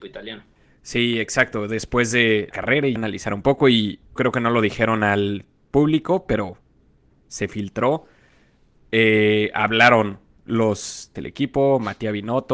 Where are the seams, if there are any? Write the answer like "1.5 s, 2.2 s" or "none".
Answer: 2.5 s, 3.0 s, 4.2 s, 11.2 s

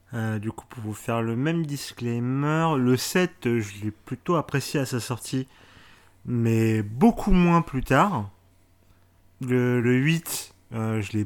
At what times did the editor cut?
9.8 s

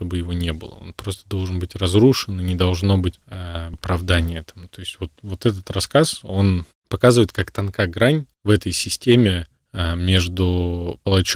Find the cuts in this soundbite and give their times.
3.7 s, 8.3 s

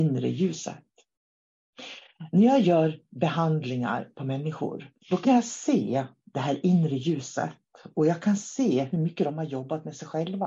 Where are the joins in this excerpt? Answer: 5.0 s

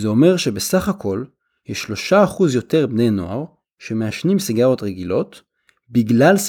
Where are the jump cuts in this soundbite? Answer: none

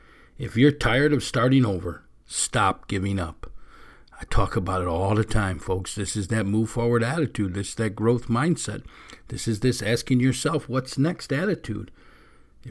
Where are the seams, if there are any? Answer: none

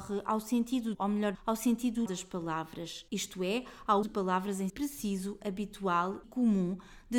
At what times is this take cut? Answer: 0.9 s, 1.3 s, 2.1 s, 4.0 s, 4.7 s, 6.2 s

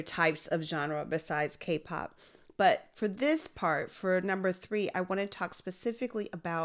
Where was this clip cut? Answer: none

